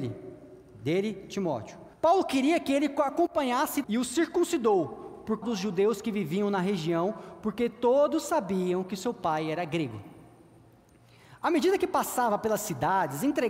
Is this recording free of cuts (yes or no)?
no